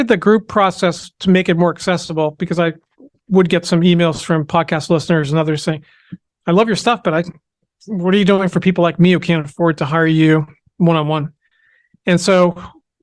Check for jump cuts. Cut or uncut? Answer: uncut